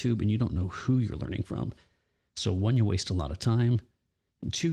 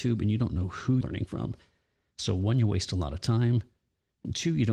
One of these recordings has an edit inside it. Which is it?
second; 1 cut; at 1.0 s

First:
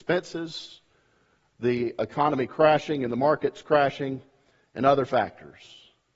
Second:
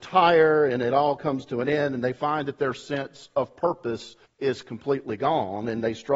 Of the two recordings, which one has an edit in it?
second; 1 cut; at 4.2 s

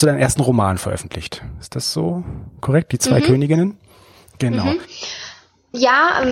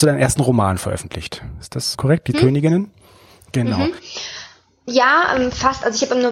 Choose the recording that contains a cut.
second; 2 cuts; at 1.9 s, 2.3 s

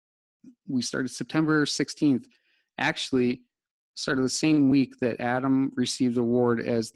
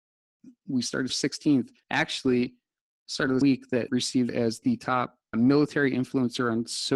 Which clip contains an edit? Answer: second; 6 cuts; at 1.1 s, 1.8 s, 3.4 s, 3.9 s, 4.3 s, 5.3 s

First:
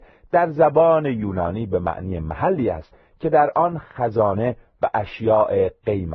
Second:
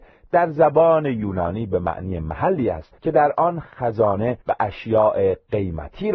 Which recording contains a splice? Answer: second; 2 cuts; at 3.0 s, 4.4 s

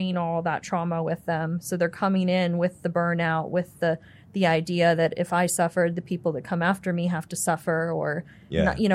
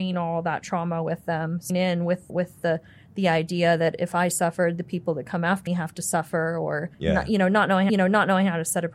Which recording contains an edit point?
second; 5 cuts; at 1.7 s, 2.3 s, 5.7 s, 6.9 s, 7.9 s

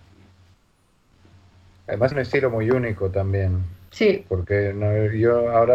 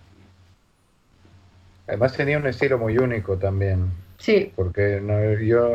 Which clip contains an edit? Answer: first; 1 cut; at 2.1 s

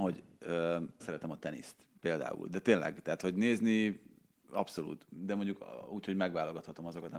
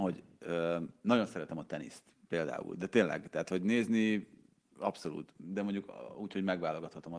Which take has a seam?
first; 1 cut; at 1.0 s

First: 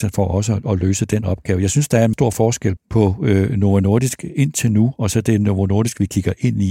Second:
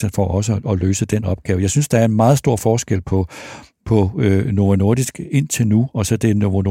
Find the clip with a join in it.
first; 2 cuts; at 2.1 s, 2.8 s

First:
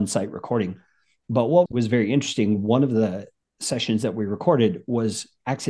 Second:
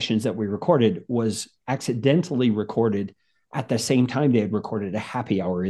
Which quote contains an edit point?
first; 2 cuts; at 1.7 s, 3.4 s

